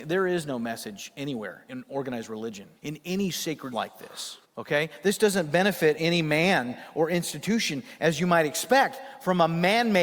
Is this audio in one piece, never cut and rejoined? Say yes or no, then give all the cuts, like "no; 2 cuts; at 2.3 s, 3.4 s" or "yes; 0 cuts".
no; 4 cuts; at 1.7 s, 2.8 s, 3.7 s, 4.4 s